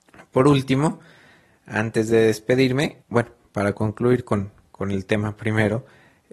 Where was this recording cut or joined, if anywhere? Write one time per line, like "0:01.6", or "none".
0:03.0